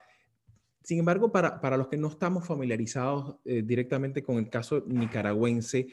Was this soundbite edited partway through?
no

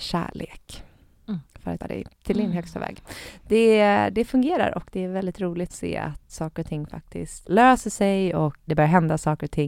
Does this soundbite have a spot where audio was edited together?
yes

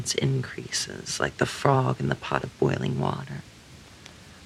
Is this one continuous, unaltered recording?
yes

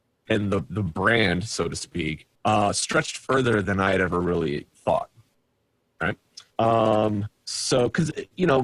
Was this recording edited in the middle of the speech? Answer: yes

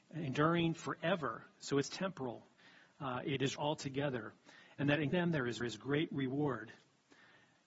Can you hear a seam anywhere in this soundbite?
yes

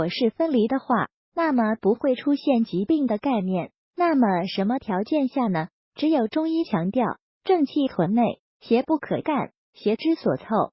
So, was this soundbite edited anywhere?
no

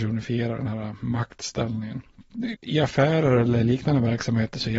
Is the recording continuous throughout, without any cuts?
no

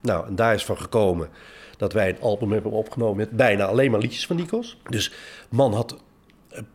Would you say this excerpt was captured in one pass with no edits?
no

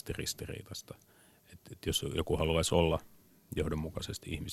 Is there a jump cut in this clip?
no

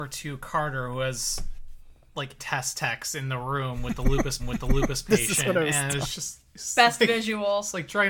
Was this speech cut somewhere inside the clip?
yes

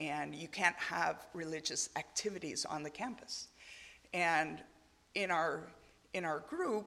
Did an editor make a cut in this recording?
no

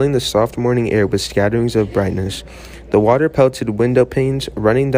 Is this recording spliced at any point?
no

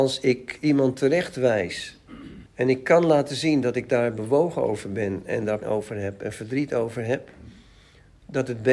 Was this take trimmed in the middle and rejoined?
yes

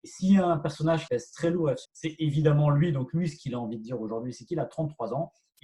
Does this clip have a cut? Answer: yes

